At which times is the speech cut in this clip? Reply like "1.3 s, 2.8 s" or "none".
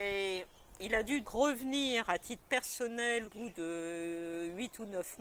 1.2 s, 3.2 s